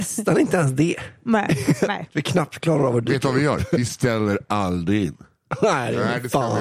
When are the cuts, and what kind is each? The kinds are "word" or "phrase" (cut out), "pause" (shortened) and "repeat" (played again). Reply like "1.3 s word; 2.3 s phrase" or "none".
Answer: none